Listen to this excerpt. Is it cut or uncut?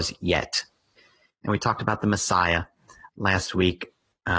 uncut